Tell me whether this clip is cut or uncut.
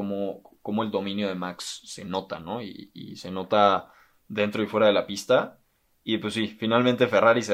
uncut